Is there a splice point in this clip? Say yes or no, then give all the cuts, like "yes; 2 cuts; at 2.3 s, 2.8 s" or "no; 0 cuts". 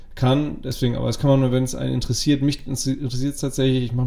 no; 0 cuts